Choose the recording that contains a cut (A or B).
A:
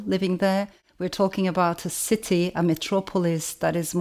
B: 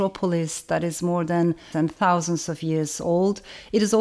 B